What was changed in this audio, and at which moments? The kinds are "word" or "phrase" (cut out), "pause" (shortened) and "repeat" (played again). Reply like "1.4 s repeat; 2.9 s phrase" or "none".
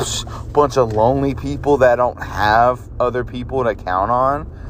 none